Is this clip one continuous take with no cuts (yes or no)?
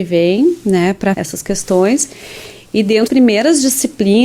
no